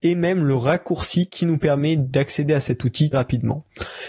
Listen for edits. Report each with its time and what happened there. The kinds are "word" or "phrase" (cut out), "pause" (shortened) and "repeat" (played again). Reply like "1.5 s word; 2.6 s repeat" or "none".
3.1 s word